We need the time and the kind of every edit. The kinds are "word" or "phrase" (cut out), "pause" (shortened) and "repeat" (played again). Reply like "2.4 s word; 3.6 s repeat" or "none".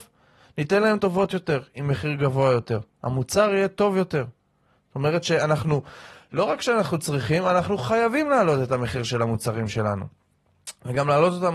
1.0 s word